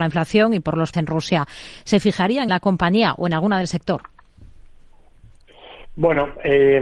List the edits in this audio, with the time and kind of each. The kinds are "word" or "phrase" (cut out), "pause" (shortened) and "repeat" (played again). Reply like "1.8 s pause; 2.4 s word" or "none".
0.9 s word; 2.5 s word